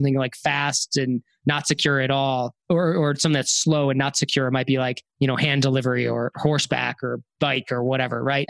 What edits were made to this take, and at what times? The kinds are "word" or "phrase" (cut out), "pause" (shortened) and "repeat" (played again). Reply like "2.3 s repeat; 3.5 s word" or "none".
2.6 s pause